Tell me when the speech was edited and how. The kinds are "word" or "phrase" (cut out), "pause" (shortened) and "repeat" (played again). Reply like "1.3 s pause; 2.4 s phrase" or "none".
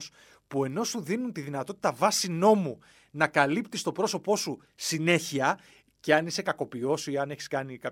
none